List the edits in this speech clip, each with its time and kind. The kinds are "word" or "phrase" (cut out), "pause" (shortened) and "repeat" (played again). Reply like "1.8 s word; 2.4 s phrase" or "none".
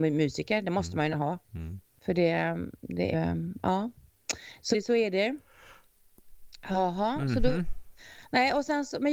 1.1 s word; 1.8 s pause; 3.1 s phrase; 4.7 s word